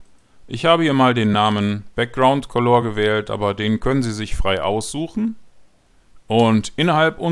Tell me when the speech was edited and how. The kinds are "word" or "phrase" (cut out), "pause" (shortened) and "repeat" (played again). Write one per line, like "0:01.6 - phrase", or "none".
none